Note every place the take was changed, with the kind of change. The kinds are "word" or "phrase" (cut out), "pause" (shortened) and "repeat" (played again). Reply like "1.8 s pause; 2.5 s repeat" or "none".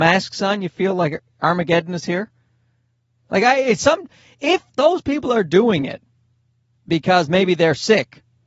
none